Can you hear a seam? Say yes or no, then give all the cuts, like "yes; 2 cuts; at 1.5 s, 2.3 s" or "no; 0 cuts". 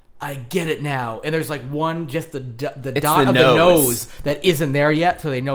no; 0 cuts